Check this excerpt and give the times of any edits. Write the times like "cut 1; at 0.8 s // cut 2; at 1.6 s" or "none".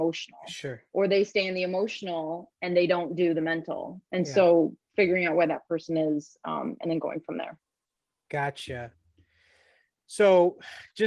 none